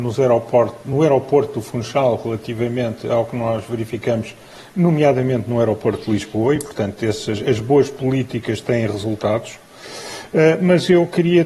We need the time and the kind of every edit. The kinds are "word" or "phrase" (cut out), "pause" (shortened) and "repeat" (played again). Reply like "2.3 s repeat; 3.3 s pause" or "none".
none